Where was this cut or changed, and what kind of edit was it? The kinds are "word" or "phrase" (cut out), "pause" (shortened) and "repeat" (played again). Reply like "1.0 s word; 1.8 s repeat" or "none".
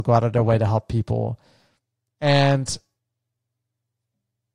none